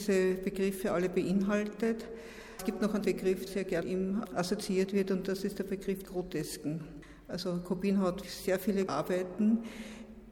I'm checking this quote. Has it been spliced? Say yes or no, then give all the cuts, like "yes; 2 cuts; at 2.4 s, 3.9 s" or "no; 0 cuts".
yes; 6 cuts; at 3.0 s, 3.5 s, 3.8 s, 6.1 s, 8.2 s, 8.9 s